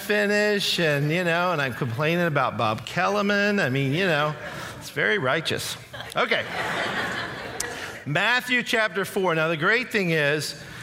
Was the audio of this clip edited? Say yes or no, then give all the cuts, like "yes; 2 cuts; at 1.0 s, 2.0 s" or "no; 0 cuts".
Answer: no; 0 cuts